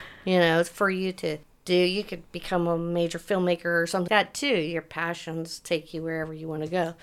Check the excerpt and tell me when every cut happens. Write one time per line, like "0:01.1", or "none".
0:01.4
0:04.1